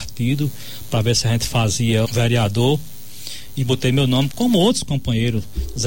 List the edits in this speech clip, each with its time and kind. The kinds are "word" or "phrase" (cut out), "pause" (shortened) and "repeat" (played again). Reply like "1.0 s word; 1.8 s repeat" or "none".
2.0 s word

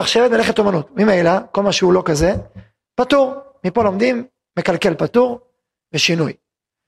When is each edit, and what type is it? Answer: none

